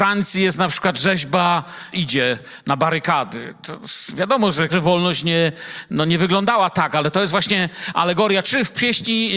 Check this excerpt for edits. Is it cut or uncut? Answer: cut